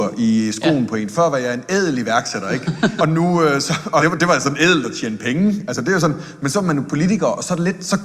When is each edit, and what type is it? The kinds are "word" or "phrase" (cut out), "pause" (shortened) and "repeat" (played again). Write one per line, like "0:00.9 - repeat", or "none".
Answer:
0:03.0 - word
0:04.0 - word